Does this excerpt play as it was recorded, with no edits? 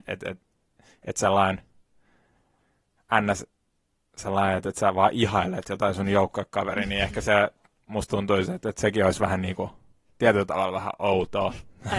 yes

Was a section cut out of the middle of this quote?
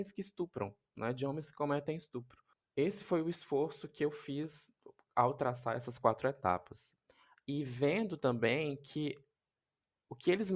no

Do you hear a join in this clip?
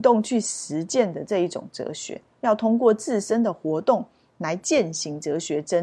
no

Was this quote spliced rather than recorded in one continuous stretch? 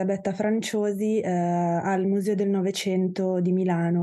no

